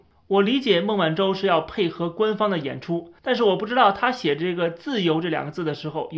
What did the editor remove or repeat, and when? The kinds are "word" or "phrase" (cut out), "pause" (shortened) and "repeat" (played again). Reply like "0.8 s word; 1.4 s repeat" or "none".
3.2 s pause